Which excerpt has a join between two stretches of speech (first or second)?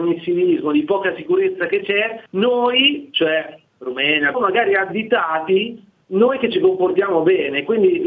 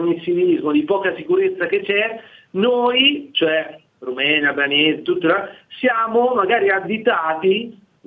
first